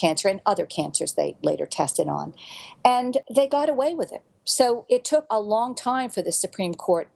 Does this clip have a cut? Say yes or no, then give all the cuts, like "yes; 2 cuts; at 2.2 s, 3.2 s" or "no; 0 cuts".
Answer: no; 0 cuts